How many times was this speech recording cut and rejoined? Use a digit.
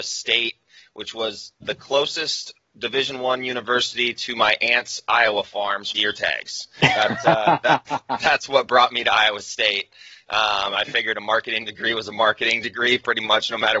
2